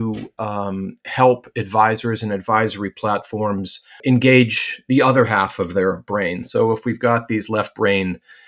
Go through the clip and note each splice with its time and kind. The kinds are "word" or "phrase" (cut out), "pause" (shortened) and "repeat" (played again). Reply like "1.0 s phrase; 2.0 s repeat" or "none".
none